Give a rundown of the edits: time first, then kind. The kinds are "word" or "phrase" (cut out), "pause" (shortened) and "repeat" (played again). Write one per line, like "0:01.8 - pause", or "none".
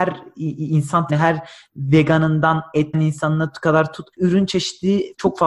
0:01.1 - word
0:02.9 - word
0:04.1 - pause